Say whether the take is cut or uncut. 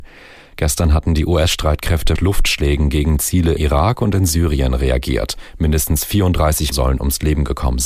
cut